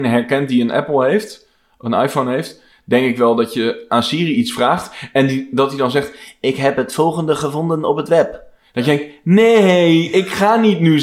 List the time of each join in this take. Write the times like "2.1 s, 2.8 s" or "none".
none